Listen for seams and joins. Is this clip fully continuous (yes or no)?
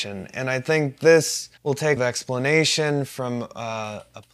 no